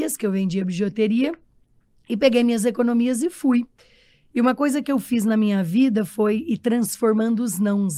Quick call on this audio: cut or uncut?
uncut